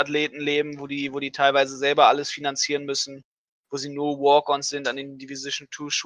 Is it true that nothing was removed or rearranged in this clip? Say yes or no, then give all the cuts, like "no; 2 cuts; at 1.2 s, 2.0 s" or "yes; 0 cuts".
yes; 0 cuts